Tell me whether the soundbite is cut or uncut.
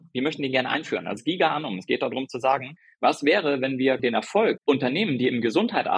cut